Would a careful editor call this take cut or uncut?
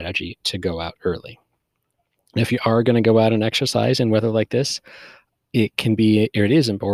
uncut